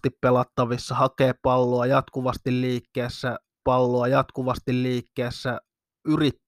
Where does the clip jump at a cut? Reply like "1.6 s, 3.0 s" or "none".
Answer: 3.6 s